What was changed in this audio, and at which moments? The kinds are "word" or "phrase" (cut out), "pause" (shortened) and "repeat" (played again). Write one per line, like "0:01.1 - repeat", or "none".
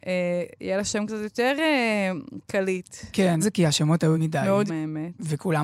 0:03.4 - word
0:04.1 - word
0:04.7 - word